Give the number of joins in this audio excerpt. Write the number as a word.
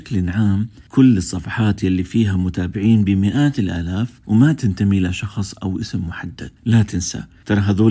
one